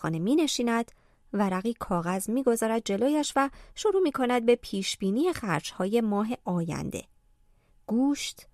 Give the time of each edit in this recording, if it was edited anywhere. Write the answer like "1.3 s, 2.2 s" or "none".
none